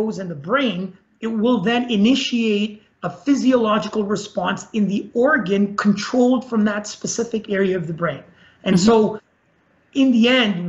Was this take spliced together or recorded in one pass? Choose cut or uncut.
uncut